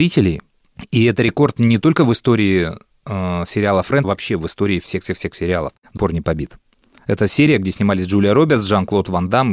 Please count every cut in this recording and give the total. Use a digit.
2